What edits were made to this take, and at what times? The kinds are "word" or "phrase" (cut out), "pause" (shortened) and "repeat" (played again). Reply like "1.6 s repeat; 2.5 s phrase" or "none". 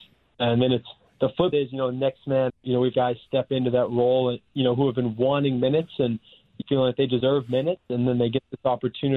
1.5 s word; 2.5 s word; 2.9 s word; 6.6 s word